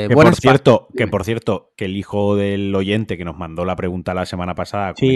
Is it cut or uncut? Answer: cut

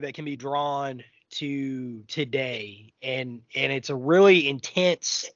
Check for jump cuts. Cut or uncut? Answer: uncut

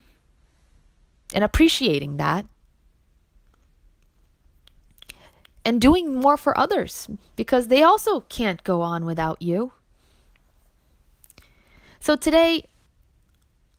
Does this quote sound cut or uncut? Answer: uncut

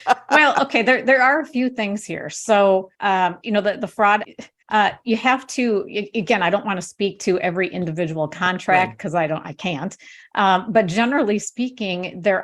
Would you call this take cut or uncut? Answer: cut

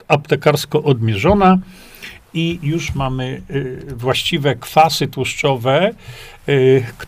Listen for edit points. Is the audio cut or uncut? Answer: uncut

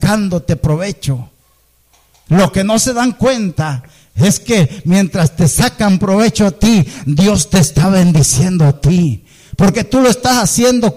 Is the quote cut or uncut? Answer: uncut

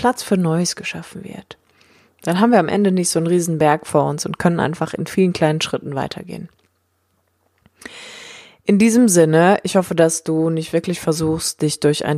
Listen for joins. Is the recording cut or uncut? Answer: uncut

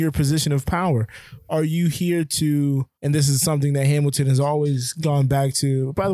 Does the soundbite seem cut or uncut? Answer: cut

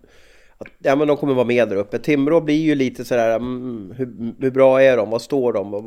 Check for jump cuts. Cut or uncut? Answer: uncut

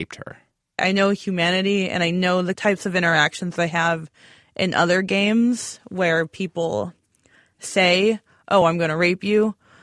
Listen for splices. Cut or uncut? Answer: uncut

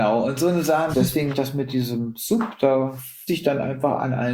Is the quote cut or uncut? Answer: cut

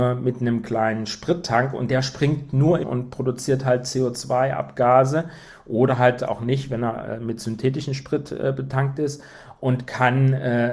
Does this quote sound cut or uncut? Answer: cut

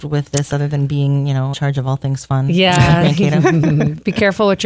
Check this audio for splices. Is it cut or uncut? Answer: cut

